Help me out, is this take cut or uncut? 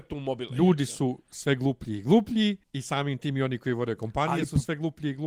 cut